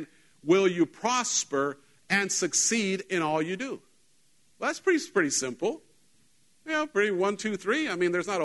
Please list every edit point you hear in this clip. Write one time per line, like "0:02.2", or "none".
none